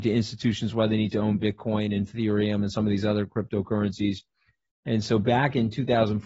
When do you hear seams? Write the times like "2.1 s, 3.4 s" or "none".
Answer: none